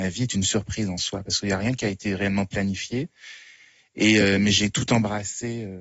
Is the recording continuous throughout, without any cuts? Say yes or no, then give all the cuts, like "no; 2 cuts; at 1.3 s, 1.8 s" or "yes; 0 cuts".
yes; 0 cuts